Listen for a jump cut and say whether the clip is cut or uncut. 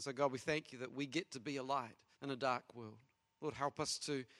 cut